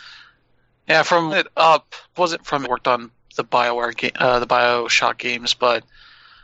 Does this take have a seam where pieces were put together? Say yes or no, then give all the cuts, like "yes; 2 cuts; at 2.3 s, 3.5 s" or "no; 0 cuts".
yes; 3 cuts; at 1.3 s, 2.2 s, 2.6 s